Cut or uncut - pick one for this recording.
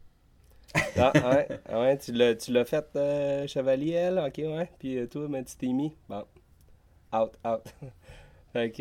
uncut